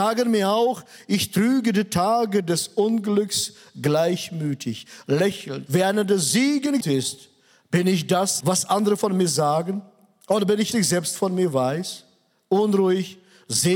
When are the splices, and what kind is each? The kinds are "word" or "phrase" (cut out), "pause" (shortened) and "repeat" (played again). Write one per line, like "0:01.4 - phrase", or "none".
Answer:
0:05.7 - phrase
0:06.8 - word
0:08.4 - word
0:10.7 - phrase